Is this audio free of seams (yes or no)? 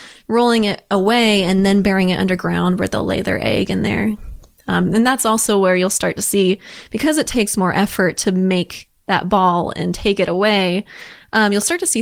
yes